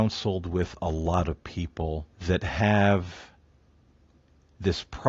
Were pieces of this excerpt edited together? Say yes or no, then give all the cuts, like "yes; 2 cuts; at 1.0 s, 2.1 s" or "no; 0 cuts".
yes; 1 cut; at 2.1 s